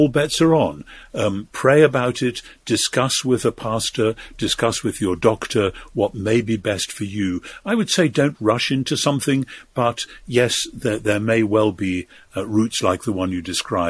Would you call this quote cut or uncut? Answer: uncut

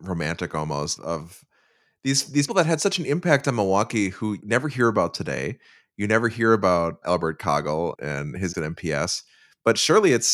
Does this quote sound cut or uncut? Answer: cut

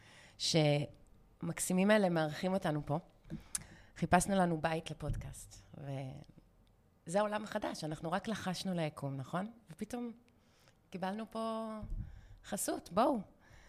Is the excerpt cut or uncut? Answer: uncut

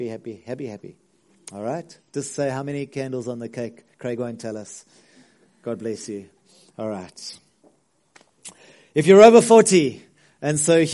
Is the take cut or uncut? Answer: uncut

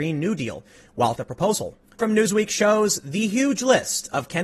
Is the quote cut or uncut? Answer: cut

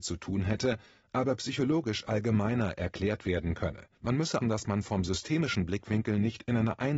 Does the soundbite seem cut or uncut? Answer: cut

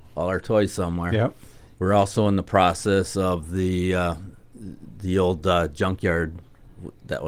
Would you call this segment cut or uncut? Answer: uncut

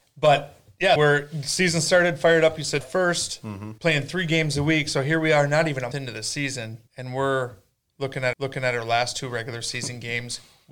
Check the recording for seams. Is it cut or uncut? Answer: cut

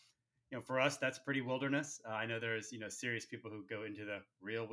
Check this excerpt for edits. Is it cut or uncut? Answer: uncut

